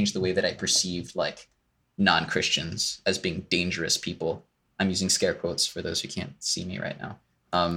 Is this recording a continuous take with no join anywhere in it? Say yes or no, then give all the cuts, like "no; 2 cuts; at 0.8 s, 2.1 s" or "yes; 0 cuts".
yes; 0 cuts